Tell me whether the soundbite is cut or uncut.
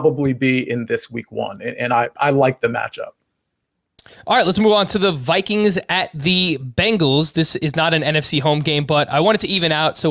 uncut